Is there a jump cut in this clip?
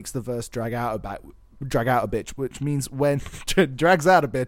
no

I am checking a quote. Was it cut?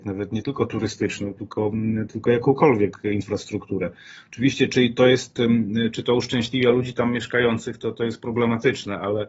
no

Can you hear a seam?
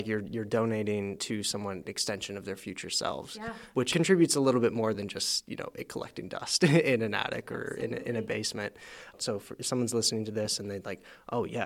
no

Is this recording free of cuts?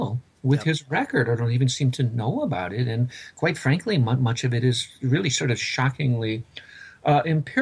yes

